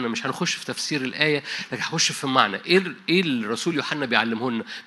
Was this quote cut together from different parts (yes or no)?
no